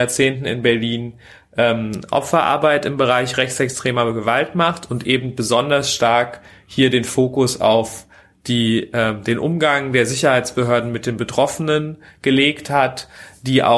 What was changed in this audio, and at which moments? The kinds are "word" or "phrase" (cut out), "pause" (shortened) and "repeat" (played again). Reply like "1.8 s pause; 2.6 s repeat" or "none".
none